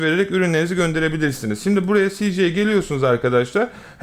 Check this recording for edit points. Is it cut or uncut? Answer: uncut